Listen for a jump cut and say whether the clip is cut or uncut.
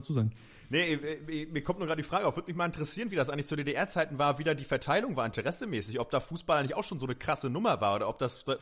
uncut